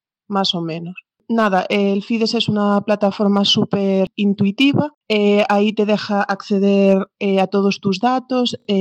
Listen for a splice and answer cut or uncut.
cut